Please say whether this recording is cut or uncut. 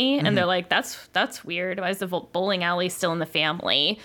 uncut